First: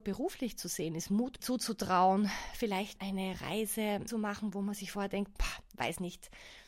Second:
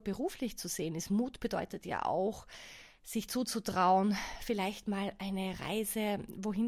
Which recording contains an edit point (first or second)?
first